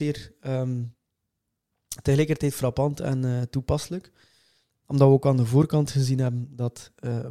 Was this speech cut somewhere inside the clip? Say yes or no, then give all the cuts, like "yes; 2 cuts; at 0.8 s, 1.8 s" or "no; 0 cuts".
no; 0 cuts